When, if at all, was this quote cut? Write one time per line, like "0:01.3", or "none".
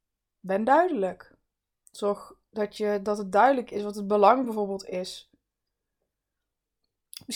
none